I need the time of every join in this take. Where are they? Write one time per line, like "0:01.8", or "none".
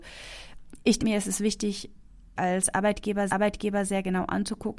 0:01.0
0:02.4
0:03.3